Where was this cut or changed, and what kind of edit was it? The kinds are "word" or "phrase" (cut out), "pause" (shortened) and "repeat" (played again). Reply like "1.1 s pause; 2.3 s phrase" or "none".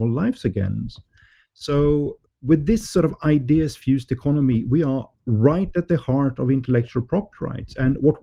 2.3 s pause